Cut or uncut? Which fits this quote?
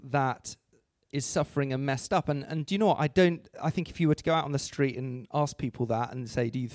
uncut